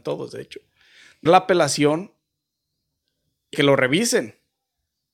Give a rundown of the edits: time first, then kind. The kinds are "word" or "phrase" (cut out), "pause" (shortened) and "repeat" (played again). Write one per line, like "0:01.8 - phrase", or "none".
0:01.3 - word
0:03.5 - word

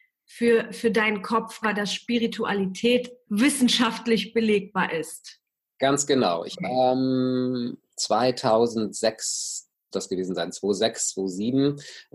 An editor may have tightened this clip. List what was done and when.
0:01.6 - word
0:03.2 - word
0:06.5 - word
0:09.9 - word

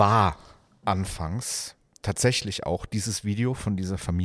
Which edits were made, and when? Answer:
none

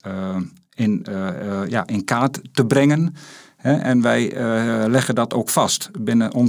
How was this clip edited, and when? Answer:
none

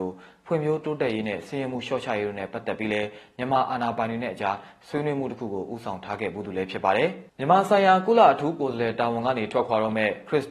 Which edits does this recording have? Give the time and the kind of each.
0:07.3 - pause

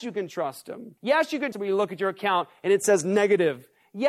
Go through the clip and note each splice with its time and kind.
0:01.0 - pause
0:01.5 - word

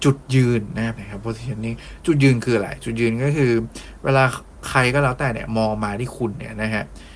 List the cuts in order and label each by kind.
0:01.0 - word

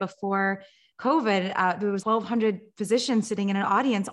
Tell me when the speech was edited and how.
0:02.0 - word

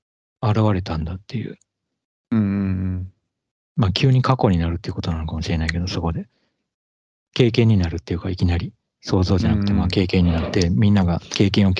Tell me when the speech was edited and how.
none

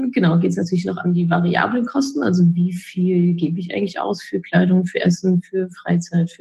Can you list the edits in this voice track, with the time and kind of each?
none

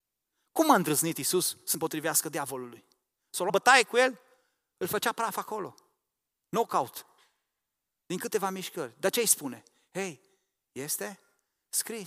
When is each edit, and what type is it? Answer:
0:01.7 - word
0:03.5 - word

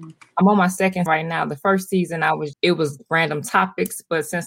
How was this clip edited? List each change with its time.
0:01.1 - word
0:02.5 - word

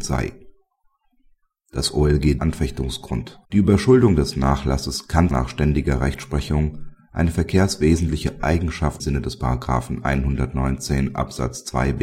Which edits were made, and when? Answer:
0:02.4 - phrase
0:03.4 - pause
0:05.3 - word
0:09.0 - word

